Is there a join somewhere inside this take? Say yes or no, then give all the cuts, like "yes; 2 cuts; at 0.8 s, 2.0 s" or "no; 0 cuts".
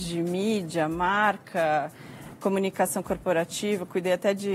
yes; 1 cut; at 2.4 s